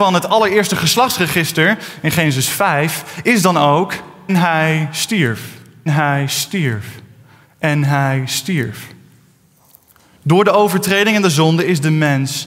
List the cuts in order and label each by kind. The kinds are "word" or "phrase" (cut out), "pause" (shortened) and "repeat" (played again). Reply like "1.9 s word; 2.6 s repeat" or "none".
4.3 s word; 5.9 s word